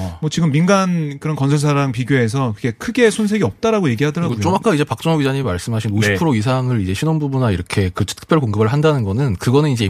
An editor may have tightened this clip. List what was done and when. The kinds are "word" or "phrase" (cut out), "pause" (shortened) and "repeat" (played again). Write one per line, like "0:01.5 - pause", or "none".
none